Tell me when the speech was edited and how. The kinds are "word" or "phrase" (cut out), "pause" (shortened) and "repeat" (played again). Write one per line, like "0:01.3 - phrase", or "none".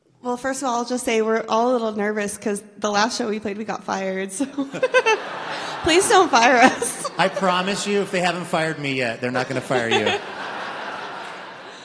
none